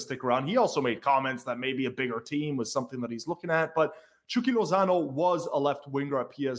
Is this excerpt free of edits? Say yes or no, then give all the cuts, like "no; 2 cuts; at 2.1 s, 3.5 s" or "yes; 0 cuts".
yes; 0 cuts